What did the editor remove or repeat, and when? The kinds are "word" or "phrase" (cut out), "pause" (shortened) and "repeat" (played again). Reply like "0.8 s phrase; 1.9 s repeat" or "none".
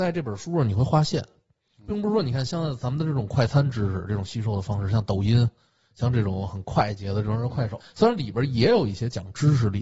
7.8 s word